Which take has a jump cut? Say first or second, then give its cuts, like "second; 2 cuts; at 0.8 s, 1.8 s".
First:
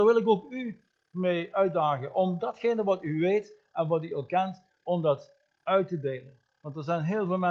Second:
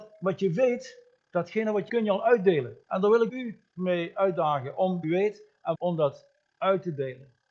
second; 6 cuts; at 1.9 s, 2.8 s, 3.3 s, 3.7 s, 5.0 s, 5.7 s